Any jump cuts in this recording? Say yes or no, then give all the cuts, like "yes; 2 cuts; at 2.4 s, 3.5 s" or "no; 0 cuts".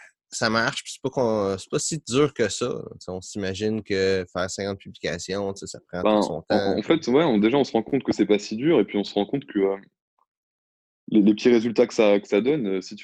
no; 0 cuts